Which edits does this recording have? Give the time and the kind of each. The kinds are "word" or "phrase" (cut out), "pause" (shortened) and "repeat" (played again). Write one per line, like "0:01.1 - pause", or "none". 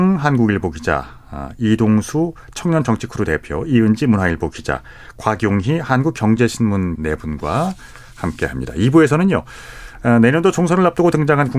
0:07.0 - word